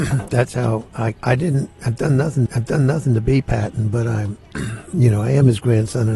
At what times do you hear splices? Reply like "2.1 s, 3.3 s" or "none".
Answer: 1.1 s, 2.5 s